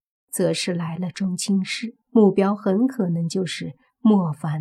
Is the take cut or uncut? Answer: cut